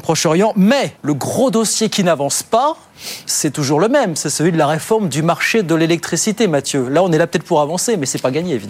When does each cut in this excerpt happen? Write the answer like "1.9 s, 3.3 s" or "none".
1.0 s